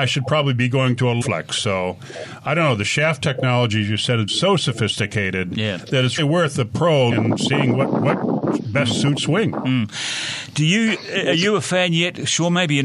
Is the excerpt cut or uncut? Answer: cut